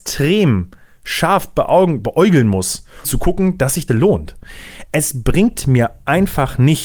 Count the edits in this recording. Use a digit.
2